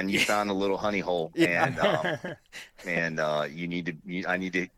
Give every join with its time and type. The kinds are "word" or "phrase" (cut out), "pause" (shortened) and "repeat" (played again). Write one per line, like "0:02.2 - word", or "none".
none